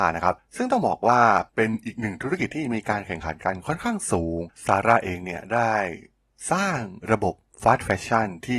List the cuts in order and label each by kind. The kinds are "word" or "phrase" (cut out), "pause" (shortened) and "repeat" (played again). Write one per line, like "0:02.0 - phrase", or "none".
0:01.5 - pause
0:04.5 - pause